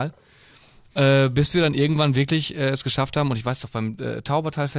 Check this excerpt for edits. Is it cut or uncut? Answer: uncut